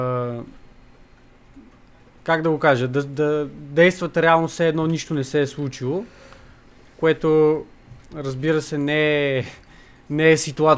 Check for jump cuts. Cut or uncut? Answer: uncut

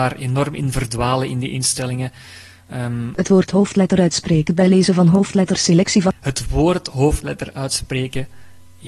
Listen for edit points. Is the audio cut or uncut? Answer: uncut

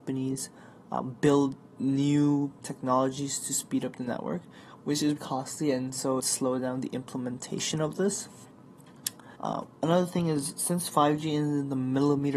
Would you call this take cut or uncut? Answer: cut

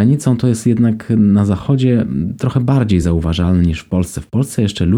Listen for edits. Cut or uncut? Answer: uncut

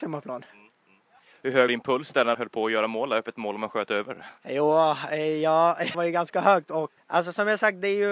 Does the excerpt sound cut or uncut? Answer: cut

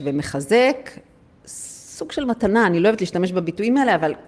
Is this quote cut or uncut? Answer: uncut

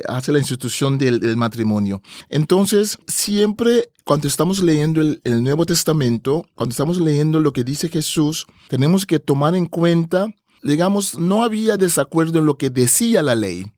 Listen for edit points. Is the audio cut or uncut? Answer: uncut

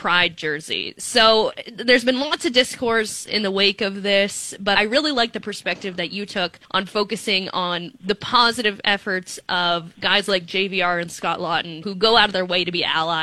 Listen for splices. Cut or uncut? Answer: cut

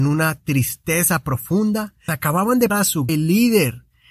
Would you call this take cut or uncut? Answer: cut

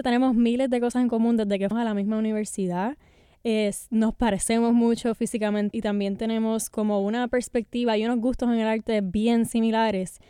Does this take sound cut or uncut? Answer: cut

